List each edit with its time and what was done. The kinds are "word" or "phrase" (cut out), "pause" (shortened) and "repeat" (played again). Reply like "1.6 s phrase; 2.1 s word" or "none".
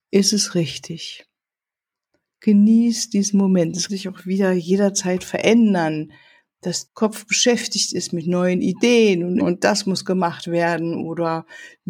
3.9 s word; 6.9 s word; 9.4 s word